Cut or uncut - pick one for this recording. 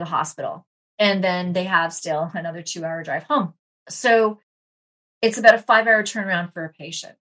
uncut